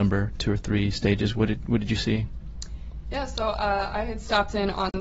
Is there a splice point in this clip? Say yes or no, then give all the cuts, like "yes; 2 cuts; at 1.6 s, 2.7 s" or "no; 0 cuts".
no; 0 cuts